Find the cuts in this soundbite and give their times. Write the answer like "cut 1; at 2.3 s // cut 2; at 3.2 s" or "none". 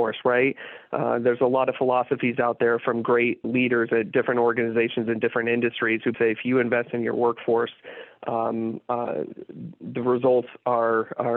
cut 1; at 3.4 s // cut 2; at 6.1 s